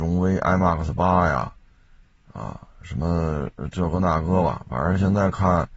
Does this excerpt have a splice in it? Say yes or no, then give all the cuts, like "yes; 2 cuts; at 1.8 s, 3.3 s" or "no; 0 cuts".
no; 0 cuts